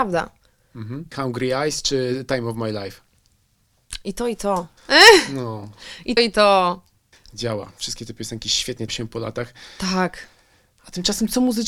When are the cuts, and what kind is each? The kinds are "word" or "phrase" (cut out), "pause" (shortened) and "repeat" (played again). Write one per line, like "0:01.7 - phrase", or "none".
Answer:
0:01.1 - word
0:04.8 - pause
0:06.2 - word
0:07.1 - pause
0:08.9 - phrase